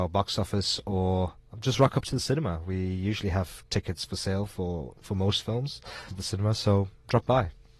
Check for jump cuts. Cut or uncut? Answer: cut